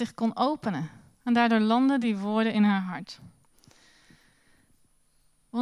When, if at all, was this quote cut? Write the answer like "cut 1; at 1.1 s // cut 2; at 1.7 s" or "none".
none